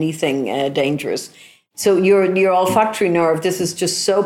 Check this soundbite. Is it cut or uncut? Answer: uncut